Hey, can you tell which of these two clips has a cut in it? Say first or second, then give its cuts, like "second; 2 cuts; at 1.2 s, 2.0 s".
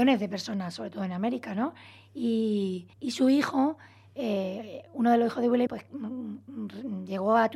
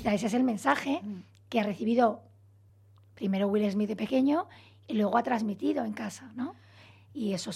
first; 2 cuts; at 2.9 s, 5.7 s